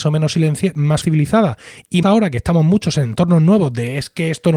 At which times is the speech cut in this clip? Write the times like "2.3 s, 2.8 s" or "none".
1.0 s, 2.0 s